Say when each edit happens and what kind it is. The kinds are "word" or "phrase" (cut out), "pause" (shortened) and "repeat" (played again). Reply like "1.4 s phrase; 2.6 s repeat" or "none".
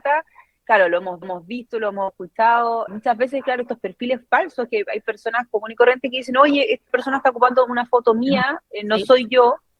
1.2 s repeat; 2.9 s word; 6.9 s word